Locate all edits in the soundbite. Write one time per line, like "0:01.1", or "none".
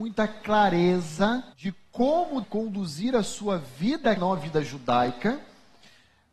0:01.5
0:02.4
0:04.2